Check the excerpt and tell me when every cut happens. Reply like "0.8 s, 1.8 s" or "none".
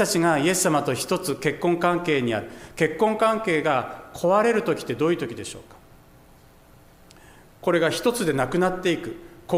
none